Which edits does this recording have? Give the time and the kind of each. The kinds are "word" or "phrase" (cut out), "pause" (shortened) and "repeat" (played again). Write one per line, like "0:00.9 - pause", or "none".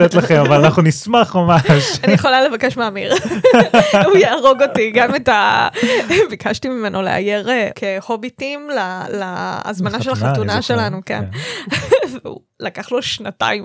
0:07.7 - word